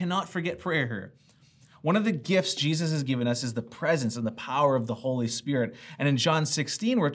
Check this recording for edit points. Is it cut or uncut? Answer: uncut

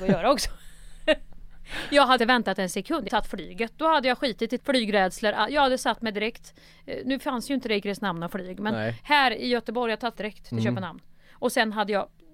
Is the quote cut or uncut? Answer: cut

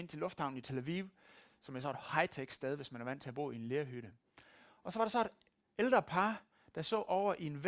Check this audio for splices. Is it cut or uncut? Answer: uncut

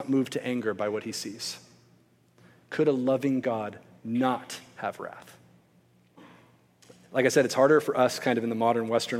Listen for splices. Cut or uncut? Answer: uncut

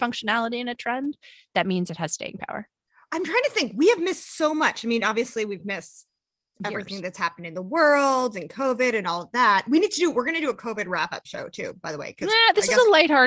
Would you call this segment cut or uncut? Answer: uncut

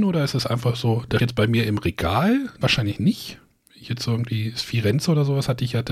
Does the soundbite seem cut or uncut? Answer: cut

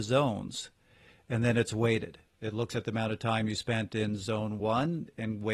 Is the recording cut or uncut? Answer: uncut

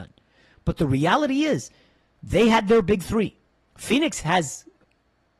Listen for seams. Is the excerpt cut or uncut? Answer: uncut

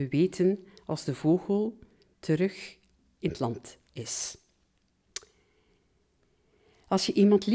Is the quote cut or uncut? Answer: uncut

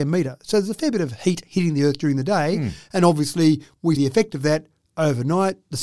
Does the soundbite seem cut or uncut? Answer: cut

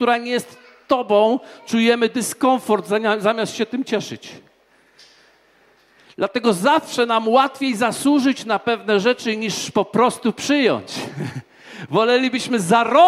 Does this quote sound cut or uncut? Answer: uncut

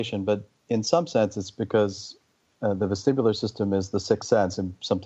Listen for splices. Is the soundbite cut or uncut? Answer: uncut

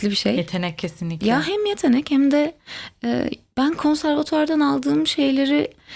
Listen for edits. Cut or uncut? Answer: uncut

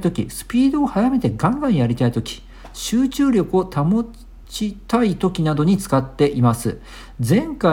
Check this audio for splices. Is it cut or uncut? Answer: cut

